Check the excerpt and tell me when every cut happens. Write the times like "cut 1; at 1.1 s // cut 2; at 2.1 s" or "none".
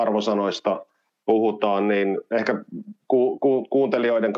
cut 1; at 1.1 s